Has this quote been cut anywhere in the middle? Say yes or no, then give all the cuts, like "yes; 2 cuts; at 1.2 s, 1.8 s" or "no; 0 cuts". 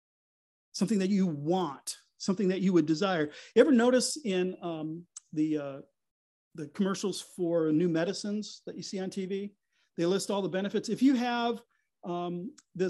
no; 0 cuts